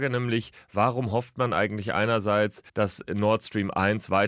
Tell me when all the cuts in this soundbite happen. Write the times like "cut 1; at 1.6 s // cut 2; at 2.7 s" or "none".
cut 1; at 2.7 s